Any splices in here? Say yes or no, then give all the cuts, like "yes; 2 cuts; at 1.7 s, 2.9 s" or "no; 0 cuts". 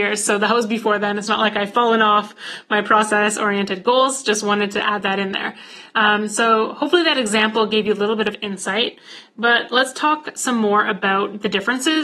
no; 0 cuts